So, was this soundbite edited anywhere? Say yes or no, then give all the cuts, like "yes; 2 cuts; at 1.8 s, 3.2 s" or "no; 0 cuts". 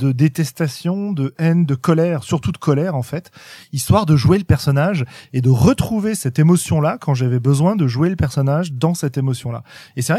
no; 0 cuts